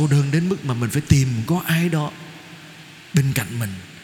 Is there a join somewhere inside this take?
no; 0 cuts

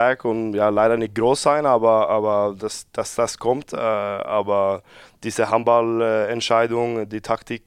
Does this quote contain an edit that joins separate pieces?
no; 0 cuts

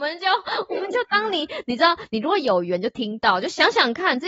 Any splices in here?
no; 0 cuts

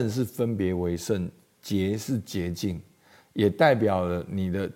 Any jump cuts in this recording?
no; 0 cuts

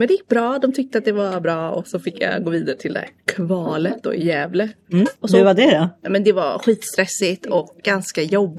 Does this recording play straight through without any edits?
no; 1 cut; at 5.2 s

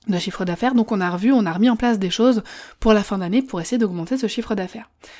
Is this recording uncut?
yes; 0 cuts

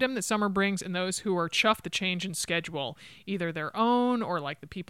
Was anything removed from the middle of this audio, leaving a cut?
yes; 1 cut; at 1.8 s

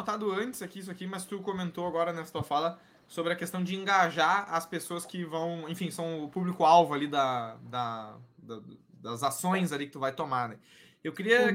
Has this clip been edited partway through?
no; 0 cuts

